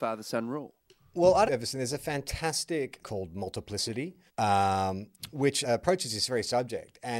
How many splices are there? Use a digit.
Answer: 4